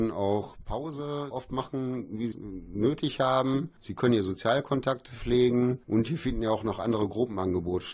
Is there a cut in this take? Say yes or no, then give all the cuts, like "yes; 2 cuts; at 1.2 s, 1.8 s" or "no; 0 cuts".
yes; 3 cuts; at 1.3 s, 2.3 s, 5.8 s